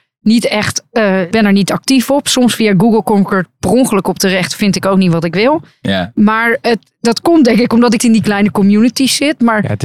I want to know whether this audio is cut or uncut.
cut